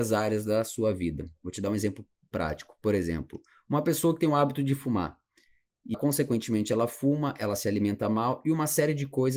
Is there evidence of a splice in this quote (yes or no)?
yes